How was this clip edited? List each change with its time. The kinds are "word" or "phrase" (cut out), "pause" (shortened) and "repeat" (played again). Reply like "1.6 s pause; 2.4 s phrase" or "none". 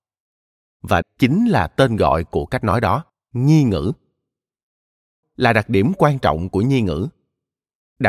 1.0 s word; 3.1 s pause; 5.2 s phrase